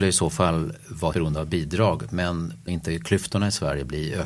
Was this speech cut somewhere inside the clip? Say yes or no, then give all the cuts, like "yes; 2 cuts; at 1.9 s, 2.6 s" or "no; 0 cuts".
yes; 2 cuts; at 1.1 s, 2.7 s